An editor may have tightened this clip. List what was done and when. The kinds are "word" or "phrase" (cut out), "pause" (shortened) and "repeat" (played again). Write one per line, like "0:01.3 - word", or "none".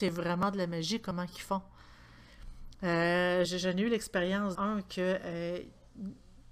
0:03.4 - word
0:04.5 - word